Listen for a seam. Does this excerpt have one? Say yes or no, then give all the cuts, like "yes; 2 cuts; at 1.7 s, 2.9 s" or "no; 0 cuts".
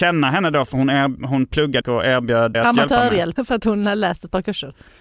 yes; 3 cuts; at 1.8 s, 2.5 s, 3.4 s